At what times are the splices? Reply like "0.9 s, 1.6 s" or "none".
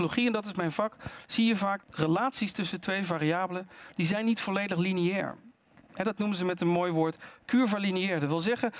1.8 s